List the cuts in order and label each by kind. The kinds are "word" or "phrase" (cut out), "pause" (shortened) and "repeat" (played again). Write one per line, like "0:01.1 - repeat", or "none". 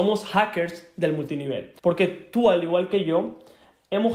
0:01.8 - pause